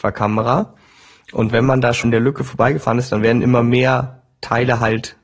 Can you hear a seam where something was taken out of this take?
yes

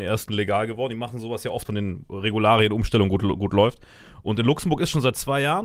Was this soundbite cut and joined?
yes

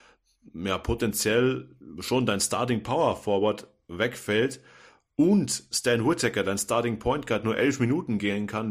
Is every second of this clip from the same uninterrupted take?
yes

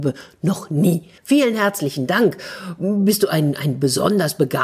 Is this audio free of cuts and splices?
no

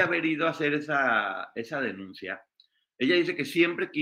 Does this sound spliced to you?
no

